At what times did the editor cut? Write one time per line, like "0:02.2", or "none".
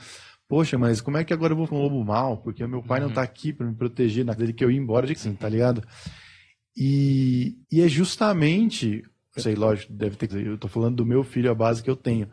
0:01.7
0:04.4
0:05.2
0:07.6
0:09.4
0:10.3